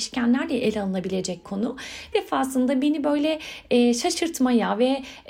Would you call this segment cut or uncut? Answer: cut